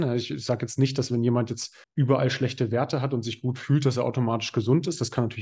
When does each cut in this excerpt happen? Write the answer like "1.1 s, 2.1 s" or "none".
1.8 s